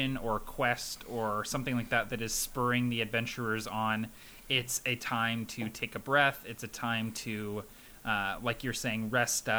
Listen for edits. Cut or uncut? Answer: uncut